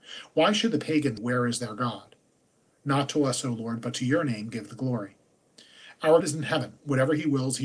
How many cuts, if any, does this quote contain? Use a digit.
2